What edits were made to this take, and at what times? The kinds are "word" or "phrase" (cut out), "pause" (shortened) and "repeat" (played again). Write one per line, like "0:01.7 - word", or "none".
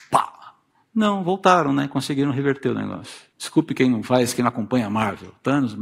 0:03.3 - pause